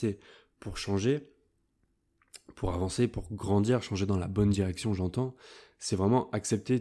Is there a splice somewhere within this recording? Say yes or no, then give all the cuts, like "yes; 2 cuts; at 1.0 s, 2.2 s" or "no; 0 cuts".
no; 0 cuts